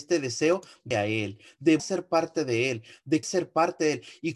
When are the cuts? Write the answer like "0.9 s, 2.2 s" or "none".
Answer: 0.9 s, 1.8 s, 3.2 s